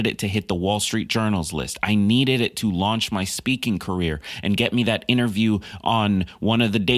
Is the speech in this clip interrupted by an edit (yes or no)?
no